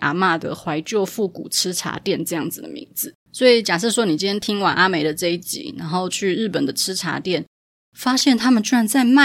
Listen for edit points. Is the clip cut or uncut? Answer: cut